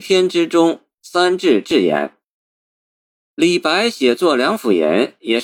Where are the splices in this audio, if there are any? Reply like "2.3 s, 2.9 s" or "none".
none